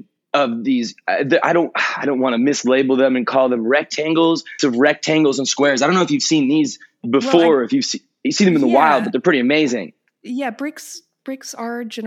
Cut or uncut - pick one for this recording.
cut